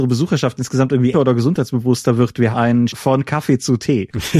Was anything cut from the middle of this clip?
yes; 3 cuts; at 1.1 s, 2.5 s, 2.9 s

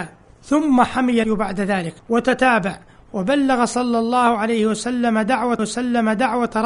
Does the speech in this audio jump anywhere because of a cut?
yes; 3 cuts; at 1.2 s, 2.0 s, 5.6 s

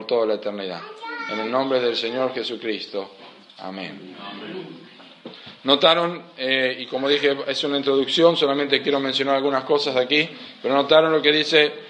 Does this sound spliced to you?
no; 0 cuts

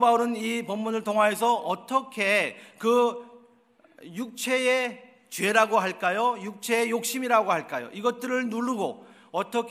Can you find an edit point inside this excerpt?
no; 0 cuts

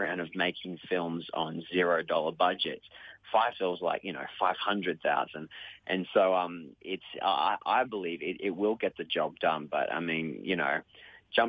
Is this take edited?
yes; 1 cut; at 3.5 s

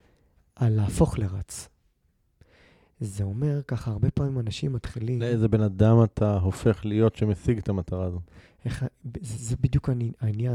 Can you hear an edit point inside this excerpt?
no; 0 cuts

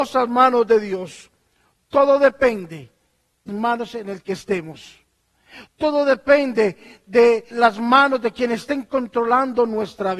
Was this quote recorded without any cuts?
no; 2 cuts; at 3.5 s, 7.5 s

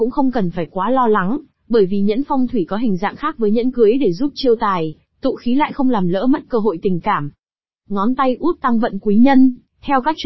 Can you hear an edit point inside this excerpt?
no; 0 cuts

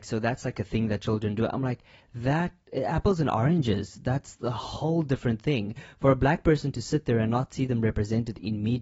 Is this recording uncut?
yes; 0 cuts

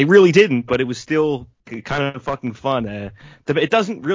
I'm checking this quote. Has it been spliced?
yes; 1 cut; at 1.6 s

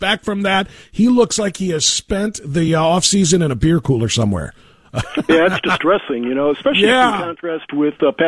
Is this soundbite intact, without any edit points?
yes; 0 cuts

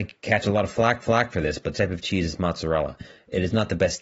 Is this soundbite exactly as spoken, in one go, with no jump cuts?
no; 2 cuts; at 1.0 s, 1.7 s

